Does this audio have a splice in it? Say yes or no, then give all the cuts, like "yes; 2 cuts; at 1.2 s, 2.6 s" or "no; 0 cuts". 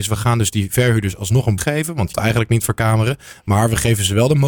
yes; 2 cuts; at 1.6 s, 2.1 s